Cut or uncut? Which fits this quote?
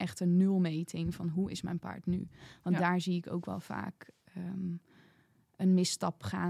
uncut